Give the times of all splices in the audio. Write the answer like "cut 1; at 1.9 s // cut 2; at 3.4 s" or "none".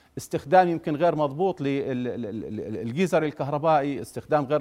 none